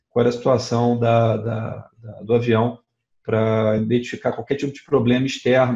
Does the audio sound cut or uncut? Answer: uncut